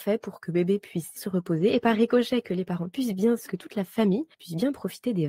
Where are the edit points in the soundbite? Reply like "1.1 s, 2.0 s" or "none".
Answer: 1.2 s, 3.5 s, 4.3 s